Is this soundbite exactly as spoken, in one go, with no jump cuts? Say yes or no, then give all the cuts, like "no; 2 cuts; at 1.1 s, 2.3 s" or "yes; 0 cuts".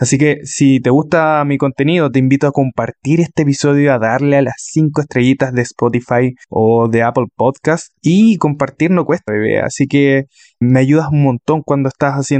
no; 4 cuts; at 6.4 s, 8.0 s, 9.3 s, 10.6 s